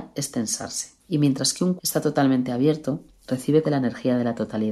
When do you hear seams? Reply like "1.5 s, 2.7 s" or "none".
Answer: 1.0 s, 1.8 s, 3.6 s